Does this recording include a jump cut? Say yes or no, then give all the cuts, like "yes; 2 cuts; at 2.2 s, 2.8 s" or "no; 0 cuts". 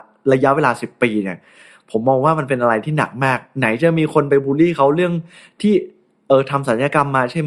no; 0 cuts